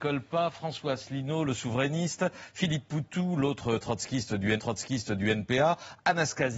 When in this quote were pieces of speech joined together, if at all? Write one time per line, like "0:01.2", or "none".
0:04.6